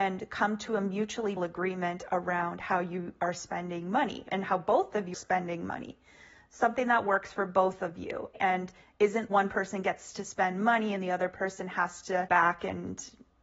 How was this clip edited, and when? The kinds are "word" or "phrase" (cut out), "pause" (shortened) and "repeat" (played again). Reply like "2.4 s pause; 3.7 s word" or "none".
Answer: 1.4 s word; 5.1 s word; 9.3 s word; 12.3 s word